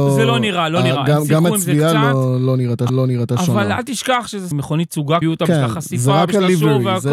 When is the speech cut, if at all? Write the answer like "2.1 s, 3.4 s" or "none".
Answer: 2.9 s, 4.5 s, 5.2 s